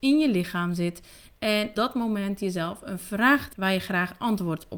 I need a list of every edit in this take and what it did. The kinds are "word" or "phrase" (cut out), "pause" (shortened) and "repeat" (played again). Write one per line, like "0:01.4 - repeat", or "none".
0:01.7 - word
0:03.5 - word